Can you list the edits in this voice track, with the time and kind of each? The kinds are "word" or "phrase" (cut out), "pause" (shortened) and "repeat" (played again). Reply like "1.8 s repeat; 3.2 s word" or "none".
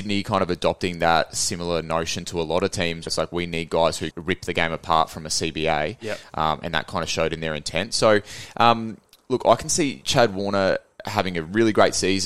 3.1 s word; 4.1 s word